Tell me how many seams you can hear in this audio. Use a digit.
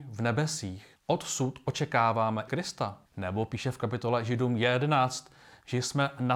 3